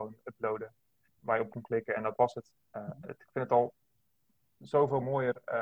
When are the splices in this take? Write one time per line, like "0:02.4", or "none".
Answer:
0:01.5